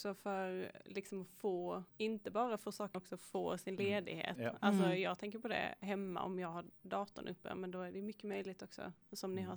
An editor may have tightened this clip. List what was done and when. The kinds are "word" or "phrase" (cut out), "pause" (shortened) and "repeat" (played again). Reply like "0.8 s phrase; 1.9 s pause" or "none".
1.9 s pause; 2.9 s phrase